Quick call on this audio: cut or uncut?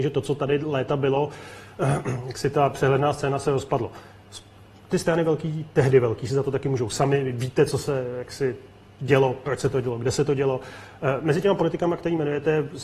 uncut